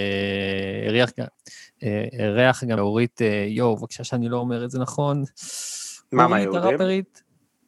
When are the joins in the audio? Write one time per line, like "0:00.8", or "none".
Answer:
0:02.8